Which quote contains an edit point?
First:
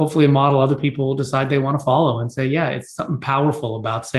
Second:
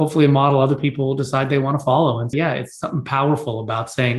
second; 1 cut; at 2.3 s

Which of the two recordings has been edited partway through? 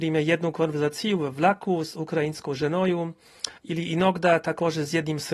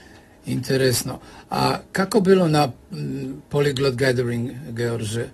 first; 1 cut; at 3.6 s

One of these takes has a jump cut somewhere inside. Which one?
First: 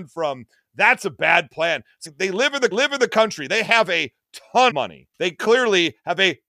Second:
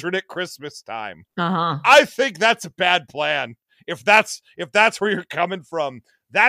first; 4 cuts; at 2.1 s, 2.7 s, 4.7 s, 5.1 s

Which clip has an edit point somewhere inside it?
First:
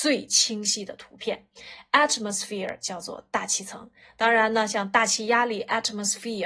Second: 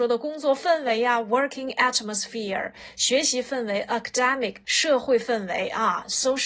second; 1 cut; at 4.6 s

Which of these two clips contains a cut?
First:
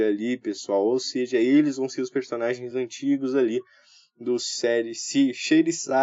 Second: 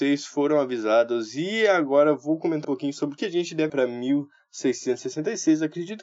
second; 3 cuts; at 2.6 s, 3.2 s, 3.7 s

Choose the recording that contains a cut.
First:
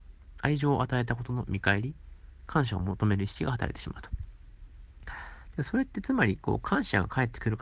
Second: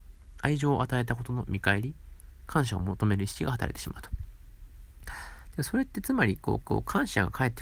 second; 1 cut; at 6.6 s

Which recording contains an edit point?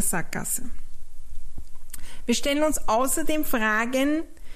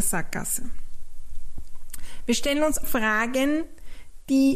second; 1 cut; at 2.8 s

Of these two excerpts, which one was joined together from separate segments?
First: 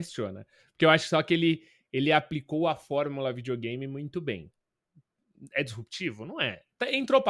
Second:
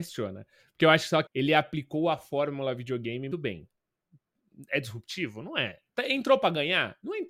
second; 2 cuts; at 1.3 s, 3.3 s

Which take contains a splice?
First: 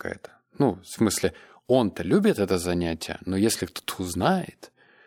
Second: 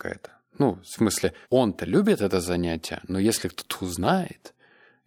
second; 1 cut; at 1.4 s

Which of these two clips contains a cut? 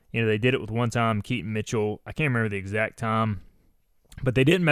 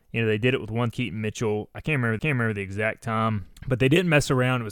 second; 3 cuts; at 0.9 s, 2.2 s, 3.6 s

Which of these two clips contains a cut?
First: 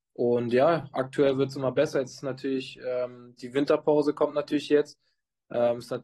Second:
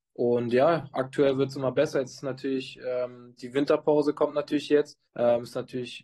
second; 1 cut; at 5.1 s

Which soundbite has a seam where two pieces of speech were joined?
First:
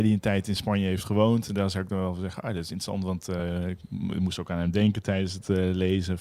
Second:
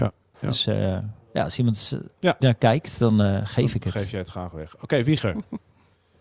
second; 1 cut; at 2.4 s

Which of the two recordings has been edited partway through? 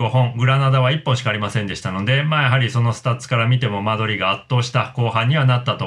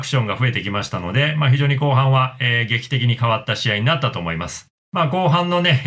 second; 1 cut; at 4.8 s

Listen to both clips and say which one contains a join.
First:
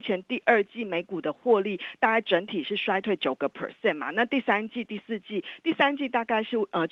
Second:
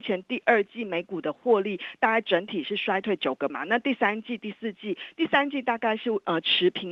second; 1 cut; at 3.5 s

